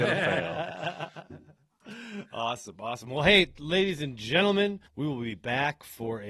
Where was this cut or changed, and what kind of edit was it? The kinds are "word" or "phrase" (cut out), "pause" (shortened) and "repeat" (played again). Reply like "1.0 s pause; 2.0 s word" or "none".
4.9 s pause

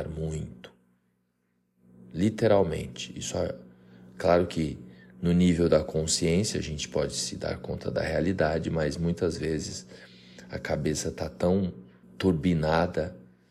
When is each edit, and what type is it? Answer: 12.0 s pause

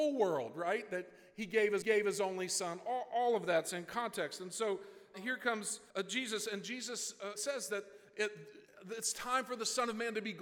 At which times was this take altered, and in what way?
1.8 s repeat; 5.1 s word; 5.9 s pause; 7.3 s word

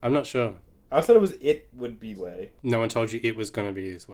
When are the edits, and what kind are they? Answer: 2.1 s word; 2.6 s pause

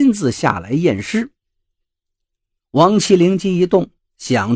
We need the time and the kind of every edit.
none

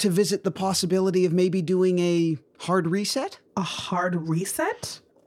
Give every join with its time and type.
2.5 s pause; 3.5 s pause

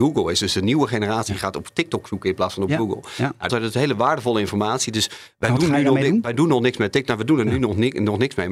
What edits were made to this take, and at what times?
3.5 s phrase

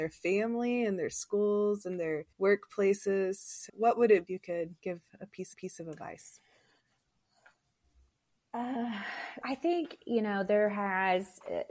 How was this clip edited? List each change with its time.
2.3 s pause; 3.7 s word; 4.3 s phrase; 4.8 s pause; 5.5 s repeat; 9.4 s word

